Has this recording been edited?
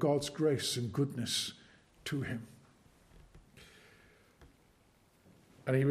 no; 0 cuts

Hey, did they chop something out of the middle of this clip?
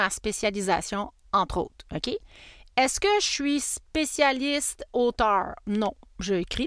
no; 0 cuts

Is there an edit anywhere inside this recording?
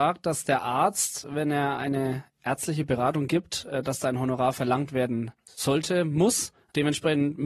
no; 0 cuts

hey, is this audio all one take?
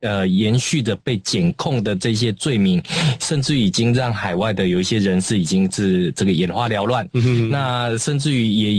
yes; 0 cuts

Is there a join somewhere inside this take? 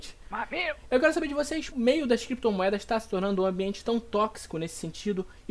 yes; 1 cut; at 1.7 s

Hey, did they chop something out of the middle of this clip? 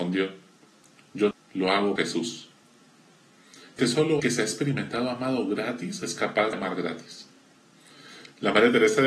yes; 5 cuts; at 1.3 s, 2.0 s, 3.8 s, 4.2 s, 6.5 s

